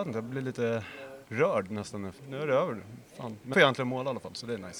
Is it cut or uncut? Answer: cut